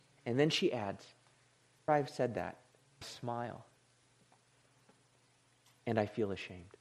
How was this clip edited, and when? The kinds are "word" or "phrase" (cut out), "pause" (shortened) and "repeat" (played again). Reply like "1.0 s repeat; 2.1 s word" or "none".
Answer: 1.9 s word; 3.0 s word